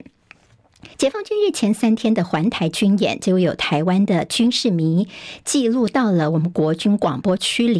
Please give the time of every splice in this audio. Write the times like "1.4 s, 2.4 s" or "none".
0.9 s